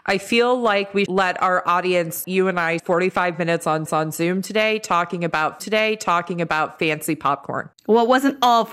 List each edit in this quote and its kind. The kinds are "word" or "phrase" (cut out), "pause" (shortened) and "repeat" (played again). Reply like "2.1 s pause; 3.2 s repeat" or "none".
1.1 s word; 2.2 s phrase; 2.8 s word; 3.9 s repeat; 5.6 s repeat; 7.7 s pause